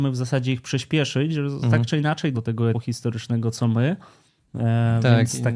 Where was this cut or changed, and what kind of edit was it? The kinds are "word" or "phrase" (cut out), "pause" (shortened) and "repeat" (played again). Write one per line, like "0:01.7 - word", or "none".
0:02.3 - word
0:02.7 - word

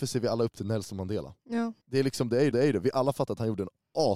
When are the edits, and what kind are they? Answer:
0:01.8 - pause
0:02.5 - repeat

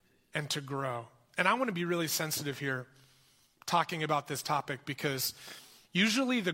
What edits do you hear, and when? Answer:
none

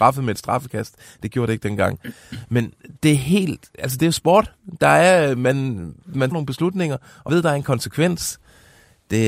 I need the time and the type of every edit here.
0:06.3 - word
0:07.3 - word

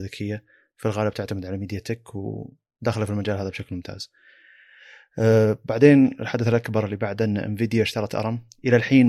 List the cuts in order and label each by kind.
none

